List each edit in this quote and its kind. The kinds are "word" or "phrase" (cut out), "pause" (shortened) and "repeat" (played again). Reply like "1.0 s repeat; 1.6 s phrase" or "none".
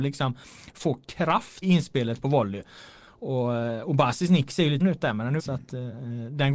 1.6 s word; 4.8 s word; 5.4 s word